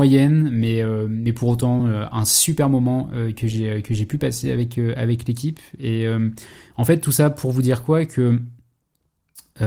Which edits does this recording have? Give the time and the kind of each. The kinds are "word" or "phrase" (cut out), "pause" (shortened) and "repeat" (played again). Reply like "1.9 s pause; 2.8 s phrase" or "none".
none